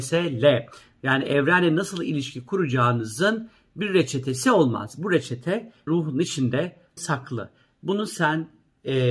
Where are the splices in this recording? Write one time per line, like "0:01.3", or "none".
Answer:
0:05.9
0:07.0